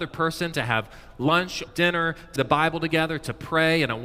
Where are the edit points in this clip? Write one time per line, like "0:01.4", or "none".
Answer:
0:01.7
0:02.4